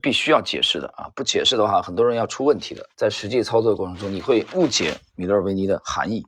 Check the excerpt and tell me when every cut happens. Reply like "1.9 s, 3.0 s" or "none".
2.9 s

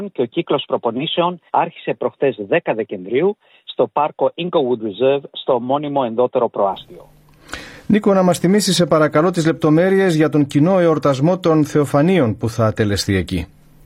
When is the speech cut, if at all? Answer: 1.5 s

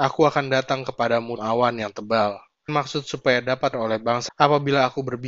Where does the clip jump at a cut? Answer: 1.4 s, 2.7 s, 3.7 s, 4.3 s

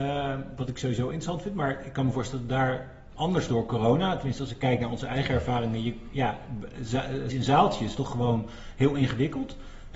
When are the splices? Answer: 3.1 s, 3.5 s, 7.3 s, 8.0 s

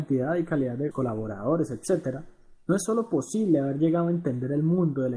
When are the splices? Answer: 0.9 s

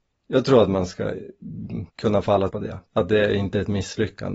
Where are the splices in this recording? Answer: 1.9 s, 2.5 s, 2.9 s

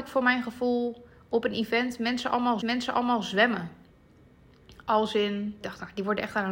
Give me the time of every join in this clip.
2.6 s, 5.6 s

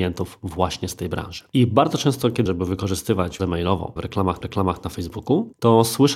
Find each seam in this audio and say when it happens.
1.5 s, 2.5 s, 3.4 s, 4.0 s, 4.4 s

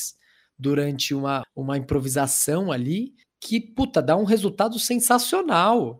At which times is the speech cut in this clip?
1.4 s, 3.2 s

